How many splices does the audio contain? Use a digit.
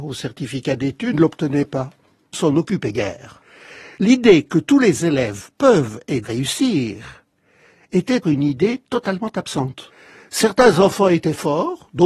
4